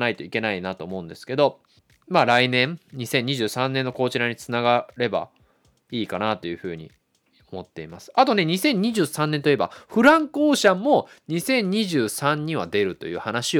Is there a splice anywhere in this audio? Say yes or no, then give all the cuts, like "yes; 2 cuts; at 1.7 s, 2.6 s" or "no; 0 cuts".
no; 0 cuts